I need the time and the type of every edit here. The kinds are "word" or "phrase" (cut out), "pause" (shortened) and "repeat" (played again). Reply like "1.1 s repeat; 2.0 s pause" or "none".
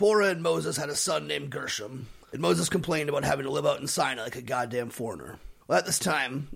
2.2 s pause; 5.6 s pause